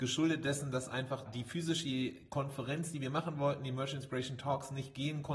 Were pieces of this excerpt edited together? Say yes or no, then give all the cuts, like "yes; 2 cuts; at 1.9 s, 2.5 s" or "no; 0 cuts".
yes; 1 cut; at 1.3 s